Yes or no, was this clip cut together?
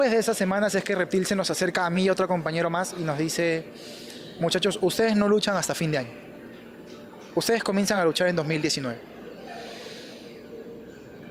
no